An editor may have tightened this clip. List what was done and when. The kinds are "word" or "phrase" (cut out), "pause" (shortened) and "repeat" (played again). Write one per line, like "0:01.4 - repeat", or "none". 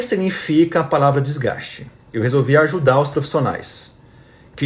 0:02.0 - pause